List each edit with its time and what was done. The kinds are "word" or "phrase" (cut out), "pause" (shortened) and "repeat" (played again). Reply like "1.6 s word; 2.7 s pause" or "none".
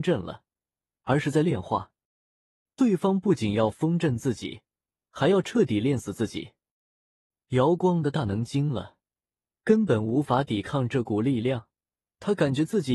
none

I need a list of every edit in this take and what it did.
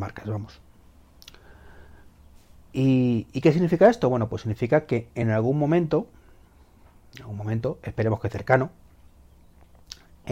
none

